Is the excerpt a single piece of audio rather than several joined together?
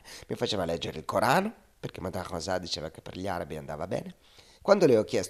yes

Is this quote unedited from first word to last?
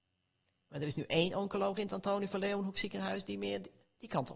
yes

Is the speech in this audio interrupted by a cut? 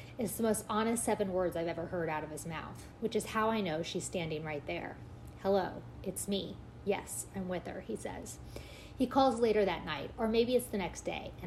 no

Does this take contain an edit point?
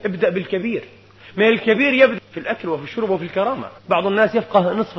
yes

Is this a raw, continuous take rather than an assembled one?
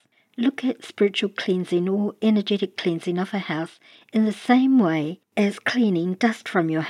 yes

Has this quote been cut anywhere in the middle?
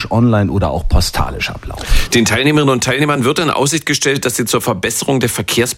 no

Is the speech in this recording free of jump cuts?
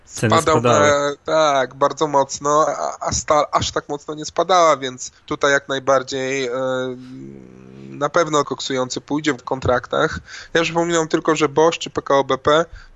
no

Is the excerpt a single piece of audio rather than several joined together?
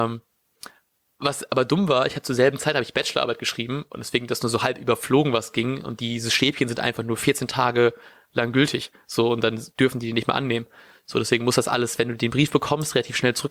yes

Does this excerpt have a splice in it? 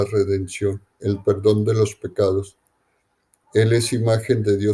yes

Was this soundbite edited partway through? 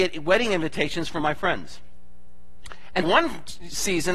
yes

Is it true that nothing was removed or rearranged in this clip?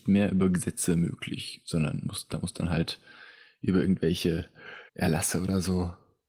no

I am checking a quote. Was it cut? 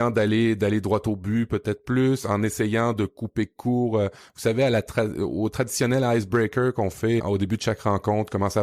yes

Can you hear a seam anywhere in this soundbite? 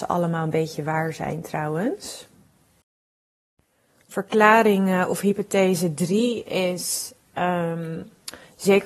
no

